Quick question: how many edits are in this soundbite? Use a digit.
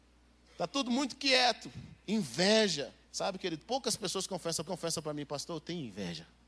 2